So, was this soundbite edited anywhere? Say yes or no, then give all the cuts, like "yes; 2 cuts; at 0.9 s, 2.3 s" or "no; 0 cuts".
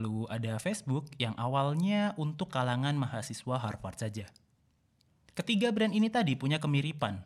no; 0 cuts